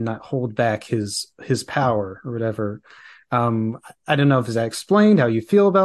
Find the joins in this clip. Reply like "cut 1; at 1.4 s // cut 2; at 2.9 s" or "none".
none

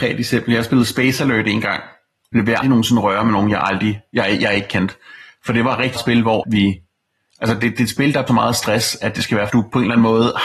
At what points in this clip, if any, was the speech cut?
cut 1; at 2.6 s // cut 2; at 6.0 s // cut 3; at 6.4 s // cut 4; at 8.3 s // cut 5; at 9.5 s

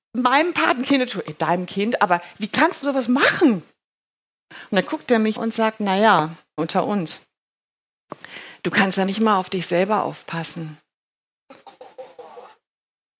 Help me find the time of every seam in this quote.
cut 1; at 2.8 s // cut 2; at 5.4 s // cut 3; at 6.6 s // cut 4; at 9.1 s

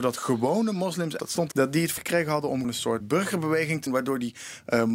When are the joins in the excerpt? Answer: cut 1; at 1.2 s // cut 2; at 1.5 s // cut 3; at 2.0 s // cut 4; at 2.6 s // cut 5; at 3.0 s // cut 6; at 3.9 s

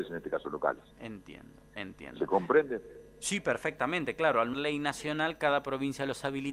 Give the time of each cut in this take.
cut 1; at 0.9 s // cut 2; at 4.5 s

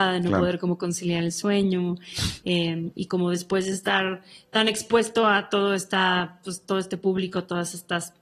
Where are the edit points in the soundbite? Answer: none

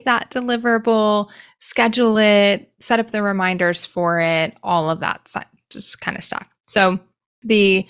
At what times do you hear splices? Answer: none

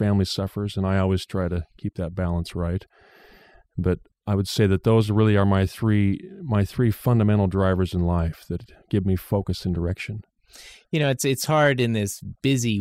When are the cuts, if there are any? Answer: cut 1; at 4.1 s

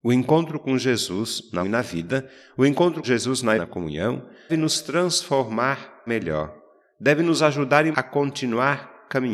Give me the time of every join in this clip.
cut 1; at 1.6 s // cut 2; at 3.0 s // cut 3; at 3.6 s // cut 4; at 4.5 s // cut 5; at 6.1 s // cut 6; at 7.9 s

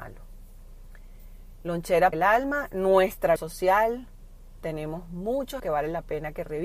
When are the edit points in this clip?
cut 1; at 2.1 s // cut 2; at 3.4 s // cut 3; at 5.6 s

